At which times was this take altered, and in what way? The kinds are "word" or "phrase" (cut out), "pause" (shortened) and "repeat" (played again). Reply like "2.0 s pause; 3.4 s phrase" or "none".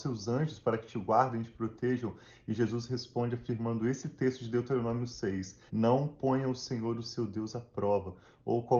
5.7 s pause